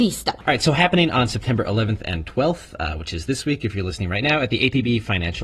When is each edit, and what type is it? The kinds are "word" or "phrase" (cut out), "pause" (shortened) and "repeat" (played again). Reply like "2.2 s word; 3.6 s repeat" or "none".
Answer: none